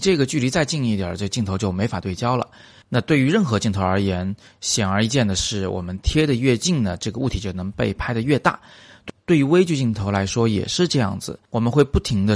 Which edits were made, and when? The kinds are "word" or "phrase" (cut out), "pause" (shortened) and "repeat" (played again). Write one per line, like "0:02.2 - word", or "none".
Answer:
none